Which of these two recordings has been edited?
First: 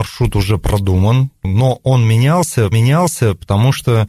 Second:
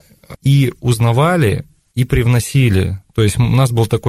first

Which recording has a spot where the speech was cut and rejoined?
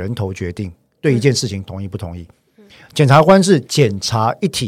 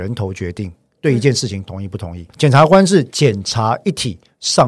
second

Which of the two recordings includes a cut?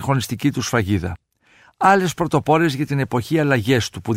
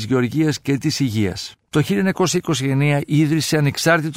second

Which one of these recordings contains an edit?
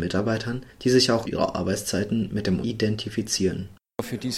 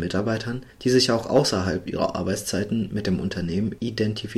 first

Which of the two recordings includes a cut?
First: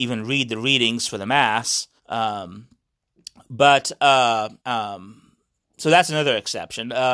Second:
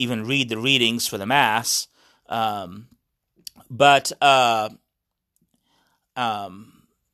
first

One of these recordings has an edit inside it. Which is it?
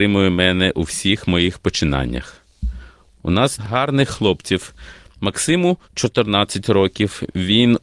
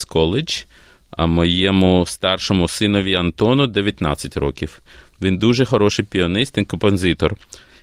first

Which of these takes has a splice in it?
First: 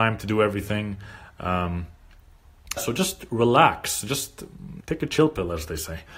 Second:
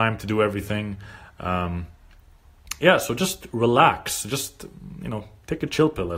first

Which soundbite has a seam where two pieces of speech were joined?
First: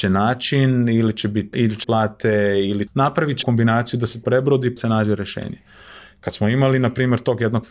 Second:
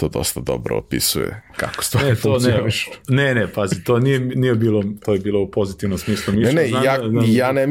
first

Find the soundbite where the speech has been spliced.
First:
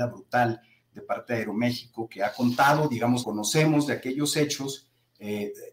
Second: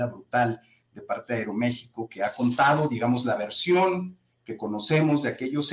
first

